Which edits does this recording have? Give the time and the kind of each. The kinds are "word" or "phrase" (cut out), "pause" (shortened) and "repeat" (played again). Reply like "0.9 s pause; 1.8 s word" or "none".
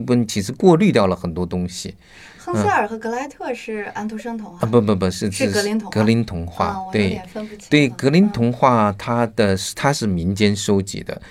none